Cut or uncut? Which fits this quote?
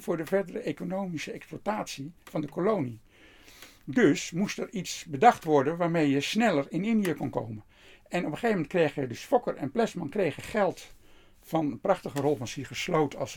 uncut